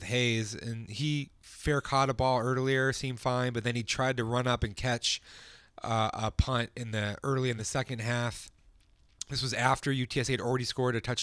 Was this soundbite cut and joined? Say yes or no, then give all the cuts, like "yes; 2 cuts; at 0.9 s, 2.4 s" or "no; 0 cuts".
no; 0 cuts